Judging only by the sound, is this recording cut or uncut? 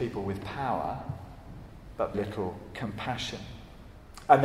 cut